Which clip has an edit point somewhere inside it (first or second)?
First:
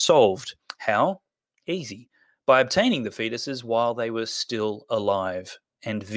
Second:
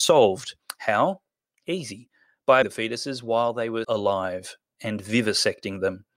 second